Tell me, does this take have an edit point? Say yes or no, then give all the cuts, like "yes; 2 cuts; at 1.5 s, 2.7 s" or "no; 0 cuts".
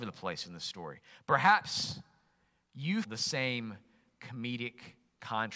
yes; 1 cut; at 3.0 s